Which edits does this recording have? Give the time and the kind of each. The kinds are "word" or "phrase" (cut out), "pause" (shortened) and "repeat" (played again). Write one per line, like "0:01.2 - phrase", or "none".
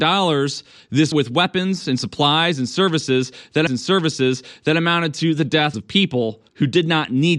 0:01.1 - word
0:03.7 - repeat
0:05.7 - phrase
0:06.5 - pause